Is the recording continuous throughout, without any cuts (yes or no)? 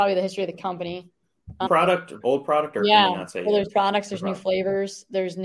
no